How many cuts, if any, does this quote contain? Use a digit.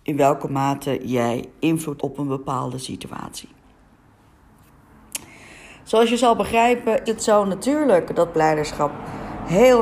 3